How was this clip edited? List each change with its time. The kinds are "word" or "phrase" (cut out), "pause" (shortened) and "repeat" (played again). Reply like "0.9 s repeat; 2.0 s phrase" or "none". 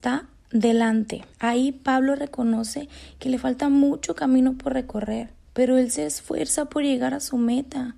1.3 s pause; 5.4 s pause